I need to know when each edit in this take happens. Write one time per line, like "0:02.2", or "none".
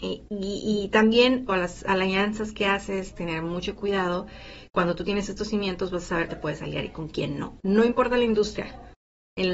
0:01.5
0:06.3